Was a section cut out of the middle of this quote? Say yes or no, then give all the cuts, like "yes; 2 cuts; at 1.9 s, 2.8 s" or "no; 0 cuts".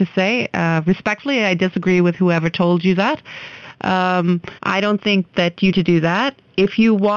yes; 2 cuts; at 4.6 s, 5.7 s